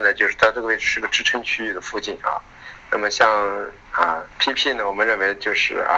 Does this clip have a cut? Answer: yes; 1 cut; at 4.3 s

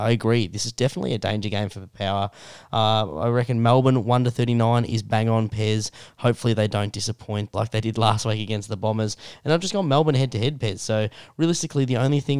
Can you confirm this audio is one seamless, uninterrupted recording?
no; 1 cut; at 7.5 s

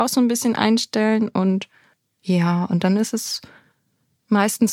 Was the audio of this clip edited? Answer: no; 0 cuts

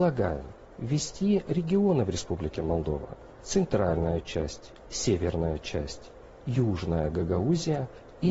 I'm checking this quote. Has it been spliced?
no; 0 cuts

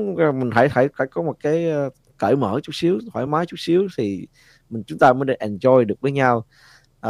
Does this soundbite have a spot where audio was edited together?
no; 0 cuts

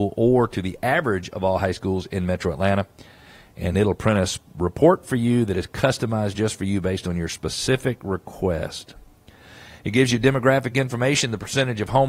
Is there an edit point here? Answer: no; 0 cuts

